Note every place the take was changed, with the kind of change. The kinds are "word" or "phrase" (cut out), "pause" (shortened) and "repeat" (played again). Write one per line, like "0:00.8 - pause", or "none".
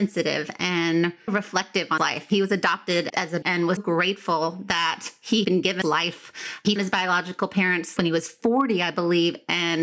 0:01.3 - word
0:02.0 - word
0:03.1 - word
0:03.4 - word
0:03.8 - word
0:05.4 - word
0:05.8 - word
0:06.8 - word
0:08.0 - word